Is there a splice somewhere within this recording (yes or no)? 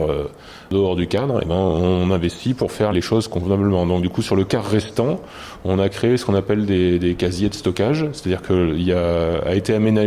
yes